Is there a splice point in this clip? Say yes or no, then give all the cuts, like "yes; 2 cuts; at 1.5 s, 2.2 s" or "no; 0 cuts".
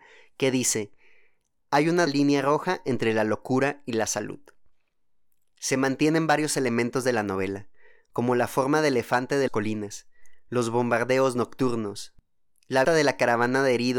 yes; 3 cuts; at 2.1 s, 9.5 s, 12.8 s